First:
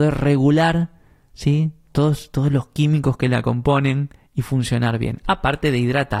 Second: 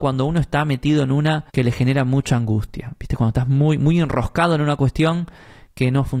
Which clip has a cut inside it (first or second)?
second